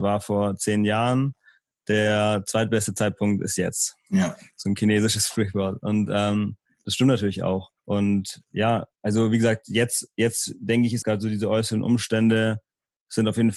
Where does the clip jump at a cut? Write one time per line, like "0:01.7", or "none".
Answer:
0:07.8
0:11.0